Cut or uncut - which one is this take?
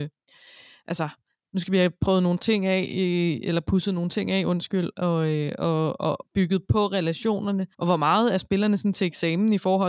cut